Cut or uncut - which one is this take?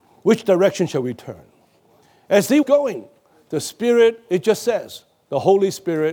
cut